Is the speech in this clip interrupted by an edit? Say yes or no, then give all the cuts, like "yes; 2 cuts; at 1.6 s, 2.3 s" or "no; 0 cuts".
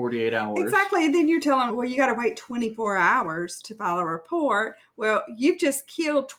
yes; 1 cut; at 1.7 s